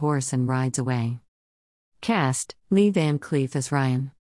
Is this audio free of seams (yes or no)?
no